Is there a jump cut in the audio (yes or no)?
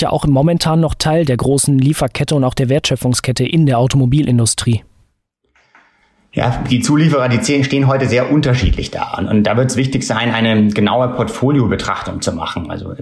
no